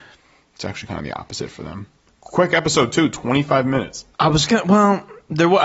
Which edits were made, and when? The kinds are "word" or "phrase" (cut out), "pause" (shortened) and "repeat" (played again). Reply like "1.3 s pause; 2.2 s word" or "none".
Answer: 4.1 s pause